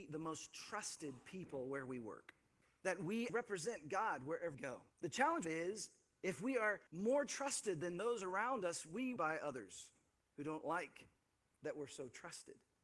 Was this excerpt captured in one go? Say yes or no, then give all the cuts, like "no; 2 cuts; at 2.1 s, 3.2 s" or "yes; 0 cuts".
no; 7 cuts; at 2.6 s, 3.3 s, 4.5 s, 4.9 s, 5.4 s, 6.9 s, 9.2 s